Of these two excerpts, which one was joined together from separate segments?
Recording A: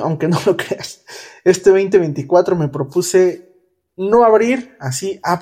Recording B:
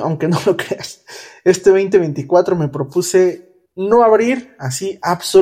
B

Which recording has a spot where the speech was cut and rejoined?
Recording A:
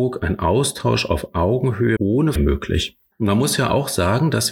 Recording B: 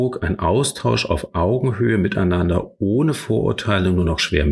A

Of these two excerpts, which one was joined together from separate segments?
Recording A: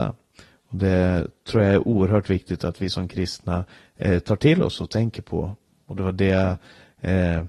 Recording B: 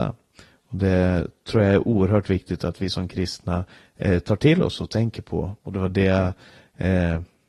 B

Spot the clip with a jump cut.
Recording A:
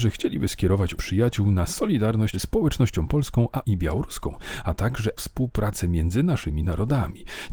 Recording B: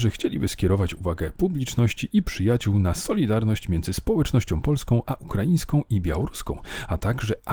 A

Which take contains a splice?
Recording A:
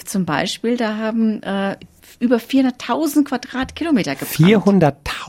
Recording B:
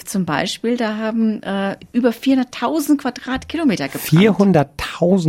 B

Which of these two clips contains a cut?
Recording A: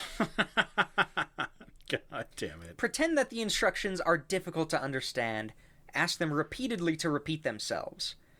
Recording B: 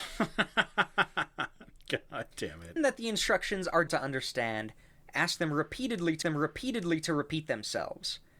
B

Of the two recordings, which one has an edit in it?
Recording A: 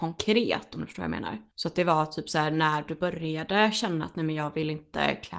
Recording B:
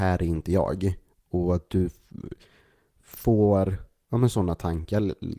A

